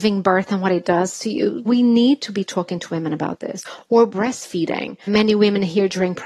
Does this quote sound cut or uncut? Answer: cut